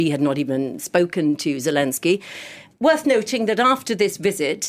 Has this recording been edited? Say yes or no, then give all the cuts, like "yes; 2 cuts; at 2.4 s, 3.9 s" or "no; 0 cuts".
no; 0 cuts